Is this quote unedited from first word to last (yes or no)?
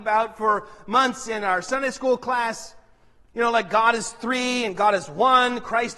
yes